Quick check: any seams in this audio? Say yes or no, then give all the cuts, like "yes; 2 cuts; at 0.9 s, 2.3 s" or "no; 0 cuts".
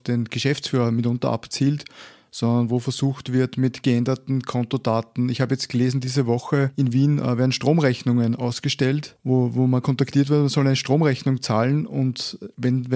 no; 0 cuts